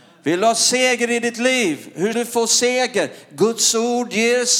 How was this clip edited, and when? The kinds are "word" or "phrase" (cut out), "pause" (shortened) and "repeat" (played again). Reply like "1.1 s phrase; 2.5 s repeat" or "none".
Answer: 2.1 s word